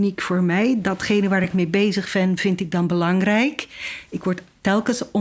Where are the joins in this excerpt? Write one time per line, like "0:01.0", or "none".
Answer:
none